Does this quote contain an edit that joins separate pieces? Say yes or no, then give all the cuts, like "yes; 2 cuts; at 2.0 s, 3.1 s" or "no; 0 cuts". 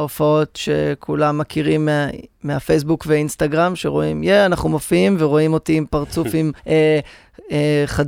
yes; 1 cut; at 6.6 s